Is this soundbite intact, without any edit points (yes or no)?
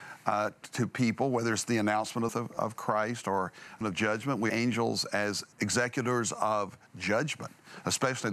no